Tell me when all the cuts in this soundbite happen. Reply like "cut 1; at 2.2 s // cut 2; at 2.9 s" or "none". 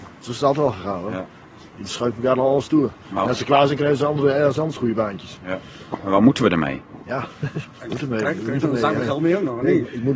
none